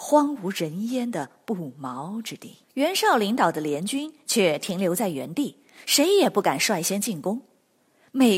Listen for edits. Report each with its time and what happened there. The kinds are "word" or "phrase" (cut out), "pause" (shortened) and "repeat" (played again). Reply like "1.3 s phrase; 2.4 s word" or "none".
2.6 s pause